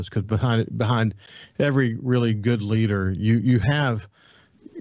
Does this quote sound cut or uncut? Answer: uncut